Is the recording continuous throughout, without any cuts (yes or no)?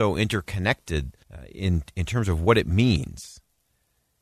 no